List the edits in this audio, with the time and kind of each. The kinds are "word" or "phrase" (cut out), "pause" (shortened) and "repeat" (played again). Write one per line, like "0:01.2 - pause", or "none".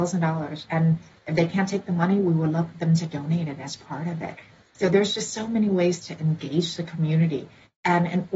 none

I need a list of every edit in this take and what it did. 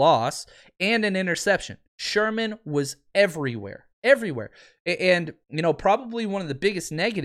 0:01.9 - pause
0:03.9 - pause
0:05.4 - pause

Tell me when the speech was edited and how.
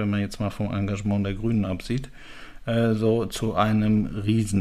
none

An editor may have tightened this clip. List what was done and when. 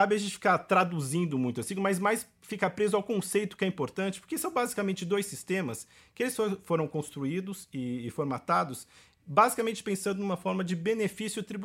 none

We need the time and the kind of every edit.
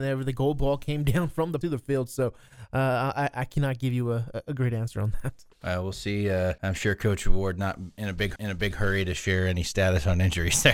0:01.6 - phrase
0:05.5 - pause
0:06.6 - pause
0:08.4 - repeat

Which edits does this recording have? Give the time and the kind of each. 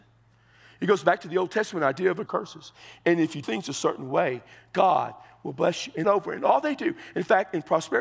0:02.3 - phrase
0:03.4 - word
0:06.0 - phrase

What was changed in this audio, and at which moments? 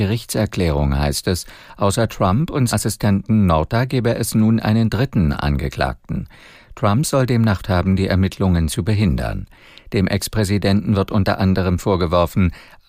0:02.7 - word
0:07.6 - word

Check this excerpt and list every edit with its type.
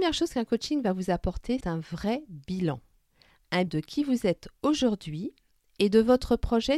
0:01.6 - word
0:03.7 - word

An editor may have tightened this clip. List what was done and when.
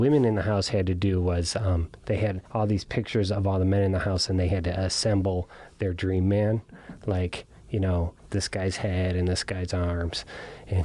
0:02.5 - pause

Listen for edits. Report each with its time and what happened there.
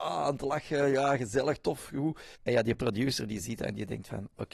0:02.4 - pause

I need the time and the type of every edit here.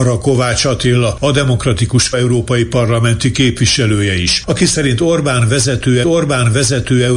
0:02.1 - word
0:06.0 - repeat

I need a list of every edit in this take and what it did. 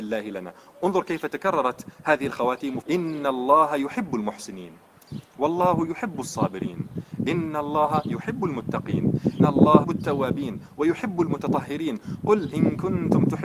0:02.8 - phrase
0:09.4 - word
0:09.8 - word

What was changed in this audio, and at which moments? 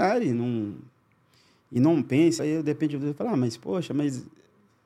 0:02.4 - word

